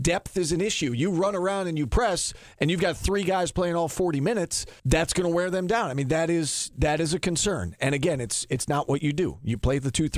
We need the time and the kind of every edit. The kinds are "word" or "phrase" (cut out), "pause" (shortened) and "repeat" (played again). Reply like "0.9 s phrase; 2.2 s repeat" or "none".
4.8 s pause